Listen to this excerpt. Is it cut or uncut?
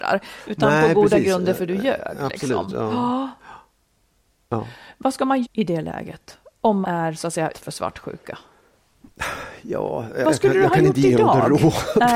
cut